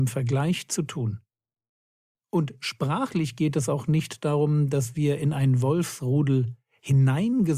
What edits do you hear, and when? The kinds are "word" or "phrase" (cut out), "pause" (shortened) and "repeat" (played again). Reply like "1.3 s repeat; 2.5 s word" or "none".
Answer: none